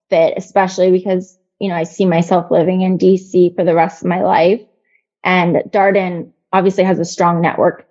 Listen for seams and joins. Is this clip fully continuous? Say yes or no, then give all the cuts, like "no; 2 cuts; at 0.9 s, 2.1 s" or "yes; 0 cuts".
yes; 0 cuts